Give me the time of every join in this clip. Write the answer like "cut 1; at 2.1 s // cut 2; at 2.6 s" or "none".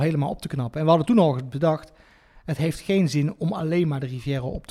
none